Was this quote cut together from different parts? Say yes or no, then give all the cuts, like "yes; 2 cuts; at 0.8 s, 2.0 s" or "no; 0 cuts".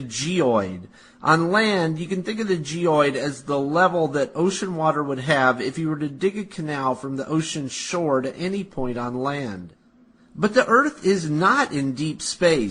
no; 0 cuts